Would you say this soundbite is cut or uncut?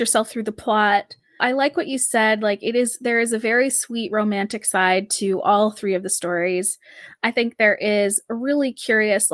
uncut